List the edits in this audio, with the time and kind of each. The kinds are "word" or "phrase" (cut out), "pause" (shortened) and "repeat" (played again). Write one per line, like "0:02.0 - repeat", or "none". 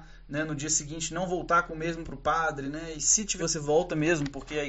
0:02.0 - word
0:02.9 - word
0:03.4 - word